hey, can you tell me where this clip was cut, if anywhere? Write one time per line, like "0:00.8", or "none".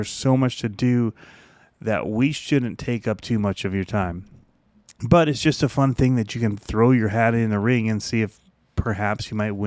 none